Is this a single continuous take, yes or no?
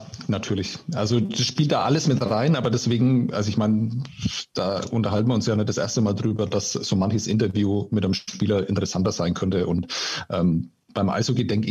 yes